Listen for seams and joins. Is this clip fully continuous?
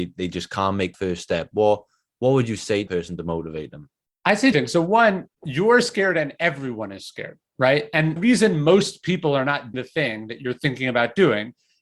no; 6 cuts; at 0.9 s, 2.9 s, 4.5 s, 5.3 s, 8.2 s, 9.7 s

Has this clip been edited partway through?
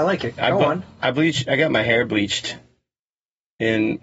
no; 0 cuts

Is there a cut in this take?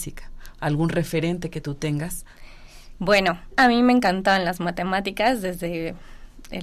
yes; 1 cut; at 3.5 s

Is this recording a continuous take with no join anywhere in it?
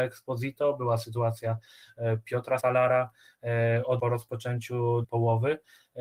no; 3 cuts; at 2.6 s, 4.0 s, 5.0 s

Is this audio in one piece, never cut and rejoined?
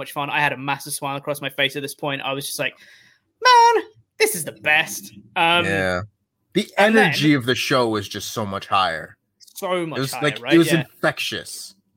yes; 0 cuts

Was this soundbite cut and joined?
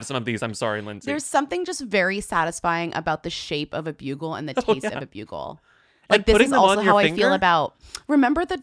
no; 0 cuts

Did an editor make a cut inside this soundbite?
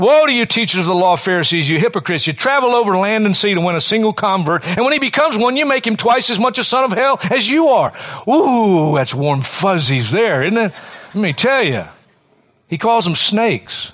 no; 0 cuts

